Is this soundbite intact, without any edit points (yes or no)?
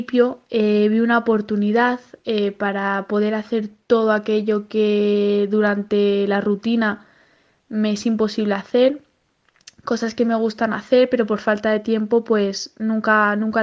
yes